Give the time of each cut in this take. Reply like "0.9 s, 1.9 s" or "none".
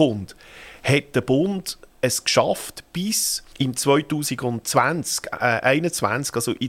3.5 s

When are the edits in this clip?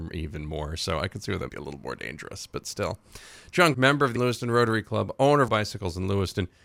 1.5 s, 3.7 s, 4.2 s, 5.5 s

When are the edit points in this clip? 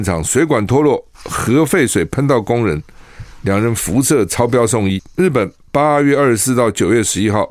1.1 s

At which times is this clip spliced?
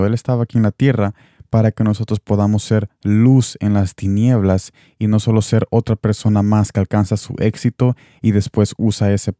none

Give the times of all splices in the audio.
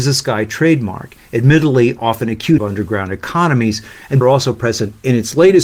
2.0 s, 2.6 s, 4.2 s

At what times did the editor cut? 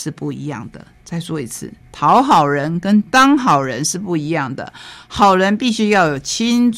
1.8 s

